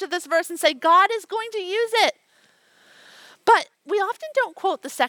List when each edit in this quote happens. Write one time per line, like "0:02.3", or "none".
0:03.7

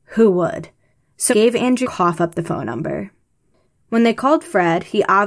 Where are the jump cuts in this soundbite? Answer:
0:01.3
0:01.8

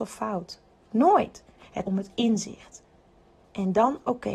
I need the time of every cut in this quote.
0:01.8

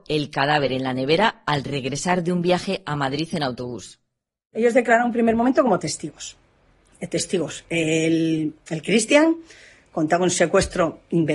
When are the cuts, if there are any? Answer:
none

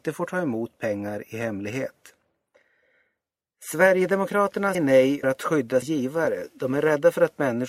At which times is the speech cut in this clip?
0:04.7
0:05.2
0:05.8

